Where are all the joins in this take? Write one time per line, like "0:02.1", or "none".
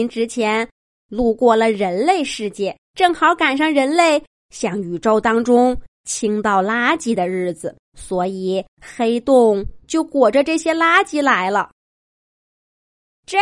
0:02.8
0:07.9
0:08.7